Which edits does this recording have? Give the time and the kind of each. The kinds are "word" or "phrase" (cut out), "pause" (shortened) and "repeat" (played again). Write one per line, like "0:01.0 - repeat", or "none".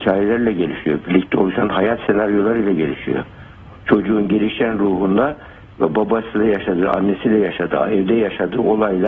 none

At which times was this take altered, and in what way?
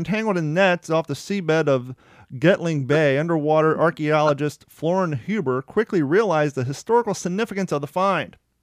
none

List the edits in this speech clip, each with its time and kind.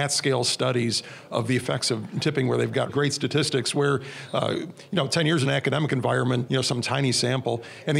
0:02.9 - word
0:05.4 - phrase
0:06.5 - phrase

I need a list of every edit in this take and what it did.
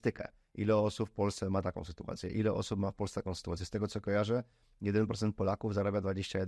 none

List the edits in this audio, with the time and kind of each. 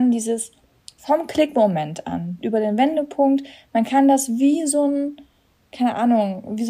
none

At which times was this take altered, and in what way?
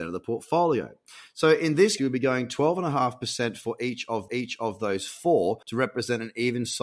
0:02.0 - word
0:04.3 - repeat
0:05.6 - pause

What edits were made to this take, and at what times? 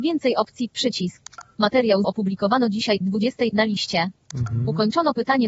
0:02.0 - phrase

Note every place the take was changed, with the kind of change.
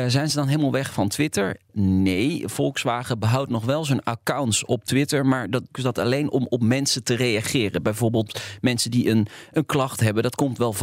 0:05.7 - phrase

